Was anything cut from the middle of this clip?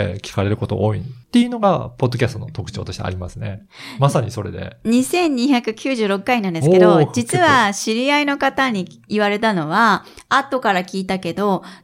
yes; 1 cut; at 1.2 s

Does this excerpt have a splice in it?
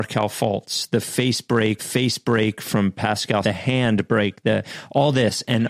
yes; 2 cuts; at 1.8 s, 3.4 s

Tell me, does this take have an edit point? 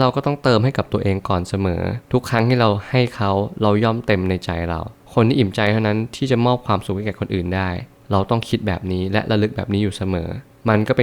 yes; 1 cut; at 2.0 s

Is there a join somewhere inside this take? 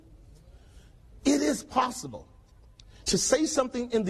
no; 0 cuts

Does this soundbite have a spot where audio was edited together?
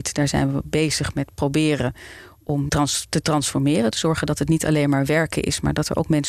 yes; 1 cut; at 2.7 s

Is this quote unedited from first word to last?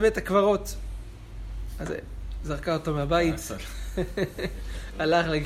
yes; 0 cuts

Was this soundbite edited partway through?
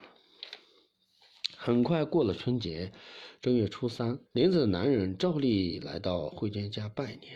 yes; 1 cut; at 4.3 s

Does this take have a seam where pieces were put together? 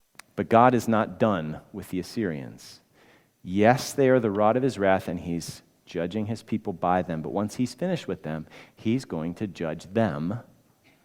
no; 0 cuts

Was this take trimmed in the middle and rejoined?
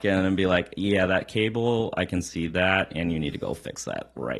no; 0 cuts

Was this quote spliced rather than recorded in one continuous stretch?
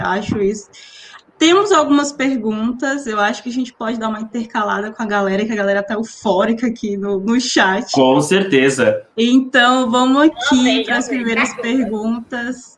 no; 0 cuts

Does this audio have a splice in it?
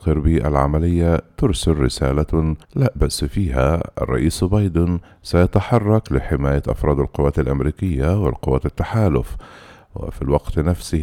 yes; 1 cut; at 2.6 s

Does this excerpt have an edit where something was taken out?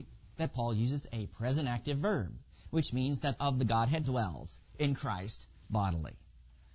yes; 2 cuts; at 3.4 s, 4.0 s

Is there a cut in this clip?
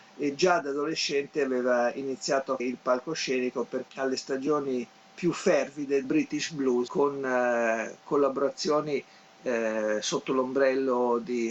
yes; 4 cuts; at 2.6 s, 3.9 s, 6.0 s, 6.9 s

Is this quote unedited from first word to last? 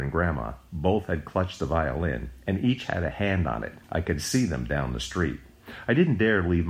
no; 1 cut; at 3.8 s

